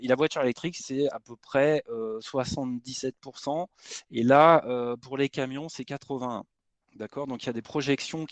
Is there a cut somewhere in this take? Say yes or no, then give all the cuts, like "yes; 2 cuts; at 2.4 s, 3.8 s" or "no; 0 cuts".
yes; 1 cut; at 6.8 s